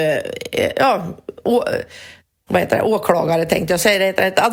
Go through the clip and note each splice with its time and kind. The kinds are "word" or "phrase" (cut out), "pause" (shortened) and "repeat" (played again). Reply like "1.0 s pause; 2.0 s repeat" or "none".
2.5 s word